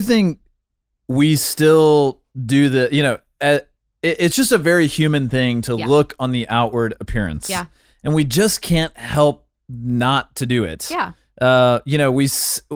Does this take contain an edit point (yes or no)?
no